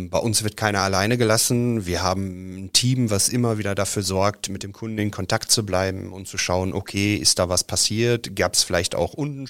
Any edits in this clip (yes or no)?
no